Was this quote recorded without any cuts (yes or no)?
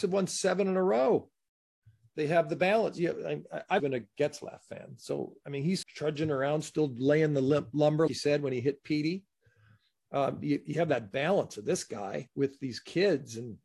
no